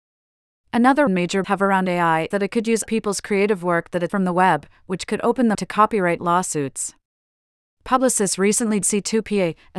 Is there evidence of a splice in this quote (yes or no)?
yes